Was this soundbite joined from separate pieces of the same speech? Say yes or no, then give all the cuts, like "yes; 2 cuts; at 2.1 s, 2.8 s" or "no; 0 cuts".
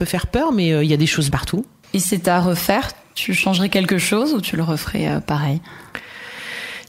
yes; 1 cut; at 1.3 s